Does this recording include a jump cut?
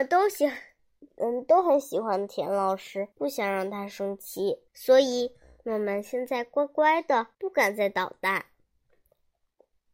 yes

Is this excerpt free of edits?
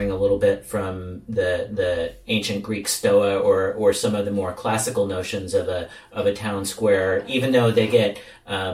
yes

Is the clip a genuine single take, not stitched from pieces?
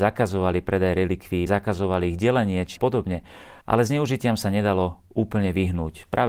no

